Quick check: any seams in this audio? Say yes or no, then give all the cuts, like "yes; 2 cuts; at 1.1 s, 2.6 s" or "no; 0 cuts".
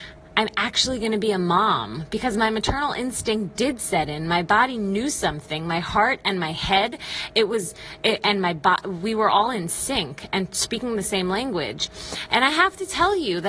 no; 0 cuts